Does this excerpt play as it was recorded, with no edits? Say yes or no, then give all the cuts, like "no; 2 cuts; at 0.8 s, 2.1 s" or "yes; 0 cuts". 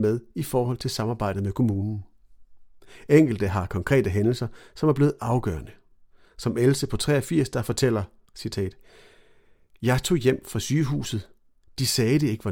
yes; 0 cuts